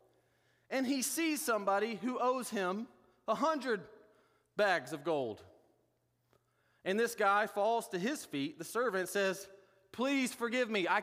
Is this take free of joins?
yes; 0 cuts

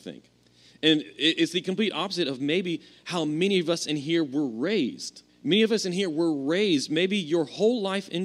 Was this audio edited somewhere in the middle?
yes; 1 cut; at 5.3 s

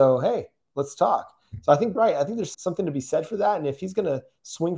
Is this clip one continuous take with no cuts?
no; 2 cuts; at 2.0 s, 2.5 s

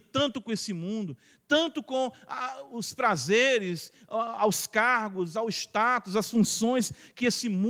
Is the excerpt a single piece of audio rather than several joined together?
yes; 0 cuts

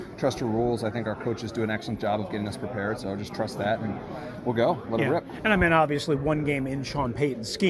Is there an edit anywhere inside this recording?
no; 0 cuts

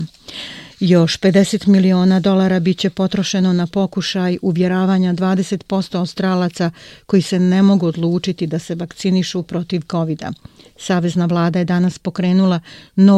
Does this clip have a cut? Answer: no; 0 cuts

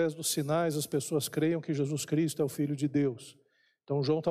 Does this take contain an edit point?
no; 0 cuts

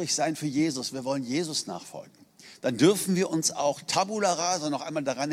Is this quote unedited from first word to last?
yes; 0 cuts

